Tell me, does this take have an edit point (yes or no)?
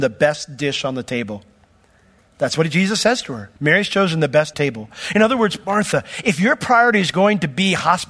yes